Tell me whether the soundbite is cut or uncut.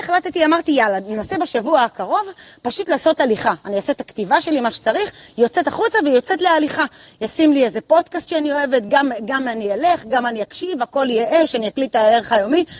uncut